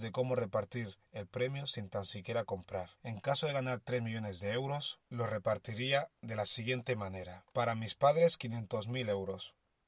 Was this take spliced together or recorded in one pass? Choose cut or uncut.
cut